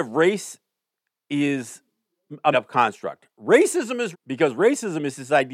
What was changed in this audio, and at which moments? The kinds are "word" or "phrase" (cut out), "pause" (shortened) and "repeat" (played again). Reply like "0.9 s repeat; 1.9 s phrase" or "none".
2.5 s word; 4.1 s word